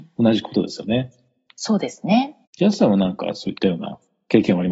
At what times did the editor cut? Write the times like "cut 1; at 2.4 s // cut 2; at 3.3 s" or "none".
cut 1; at 2.5 s